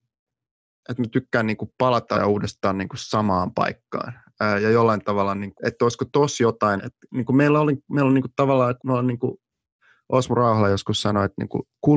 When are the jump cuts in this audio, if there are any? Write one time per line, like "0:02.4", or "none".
0:02.1
0:05.6
0:06.8
0:08.8